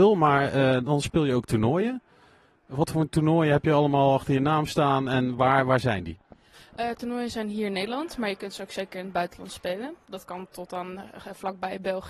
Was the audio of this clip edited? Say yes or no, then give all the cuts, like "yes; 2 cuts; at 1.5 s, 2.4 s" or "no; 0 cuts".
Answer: no; 0 cuts